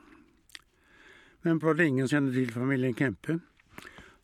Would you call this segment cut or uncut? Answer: cut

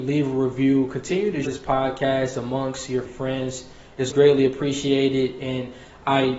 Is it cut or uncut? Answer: cut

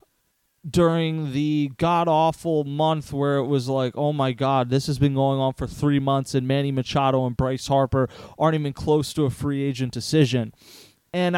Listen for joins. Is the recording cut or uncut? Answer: uncut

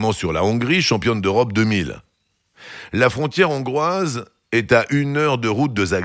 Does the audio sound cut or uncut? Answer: uncut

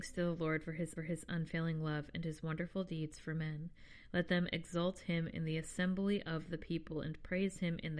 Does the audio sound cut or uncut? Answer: cut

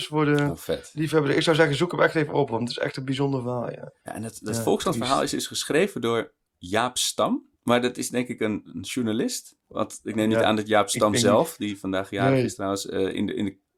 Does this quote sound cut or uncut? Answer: cut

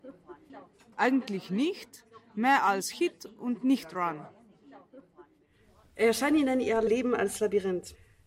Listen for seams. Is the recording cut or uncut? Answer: uncut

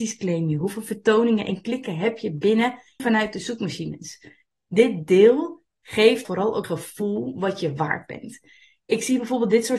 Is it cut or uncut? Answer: cut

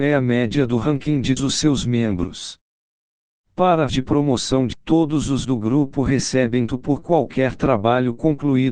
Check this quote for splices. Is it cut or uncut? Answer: cut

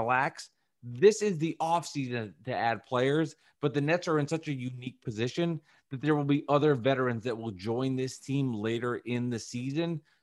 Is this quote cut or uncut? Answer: uncut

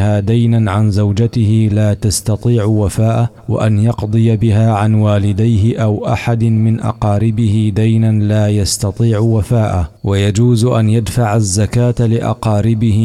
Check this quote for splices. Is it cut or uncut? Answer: cut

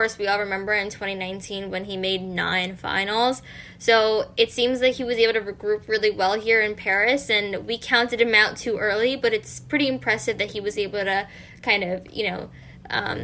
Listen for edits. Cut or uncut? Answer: uncut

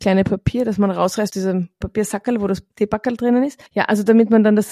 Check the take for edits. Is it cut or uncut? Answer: cut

